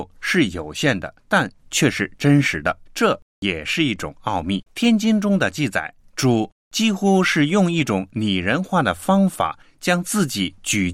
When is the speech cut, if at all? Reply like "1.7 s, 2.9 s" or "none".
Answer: 1.2 s, 2.9 s, 4.7 s, 6.0 s